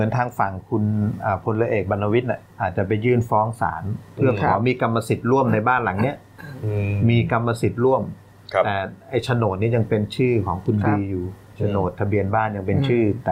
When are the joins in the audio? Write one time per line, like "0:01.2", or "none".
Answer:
0:02.5
0:11.4